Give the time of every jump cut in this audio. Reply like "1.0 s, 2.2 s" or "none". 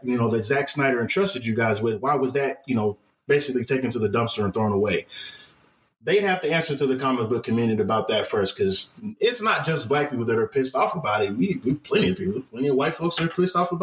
none